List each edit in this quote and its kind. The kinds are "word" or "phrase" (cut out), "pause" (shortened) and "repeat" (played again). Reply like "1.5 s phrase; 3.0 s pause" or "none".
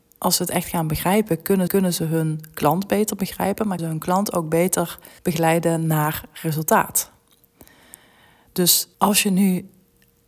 1.7 s repeat; 3.8 s word; 5.2 s pause; 8.9 s pause